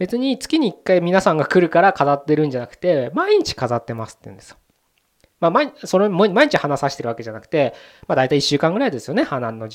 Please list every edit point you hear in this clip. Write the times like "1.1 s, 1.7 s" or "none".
none